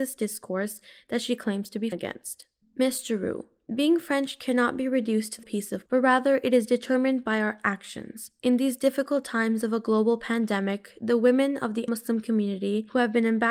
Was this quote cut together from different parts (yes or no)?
yes